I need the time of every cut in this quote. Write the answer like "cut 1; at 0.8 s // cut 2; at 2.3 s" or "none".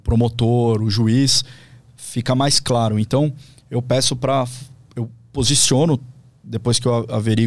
none